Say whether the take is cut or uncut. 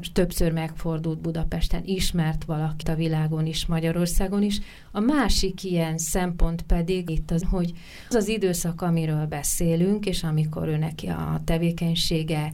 cut